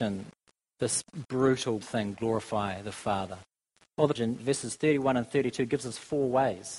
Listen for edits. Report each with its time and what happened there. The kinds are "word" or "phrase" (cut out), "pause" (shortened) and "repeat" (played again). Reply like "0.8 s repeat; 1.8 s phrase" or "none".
1.8 s word; 4.2 s word